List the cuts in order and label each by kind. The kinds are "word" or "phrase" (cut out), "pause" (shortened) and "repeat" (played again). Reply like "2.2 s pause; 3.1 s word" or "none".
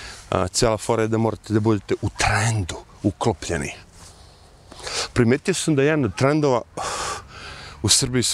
none